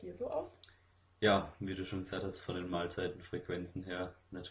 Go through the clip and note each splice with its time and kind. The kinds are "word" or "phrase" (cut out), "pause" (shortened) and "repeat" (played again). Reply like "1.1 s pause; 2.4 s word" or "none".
none